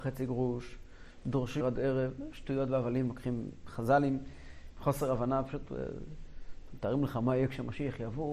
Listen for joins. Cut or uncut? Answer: cut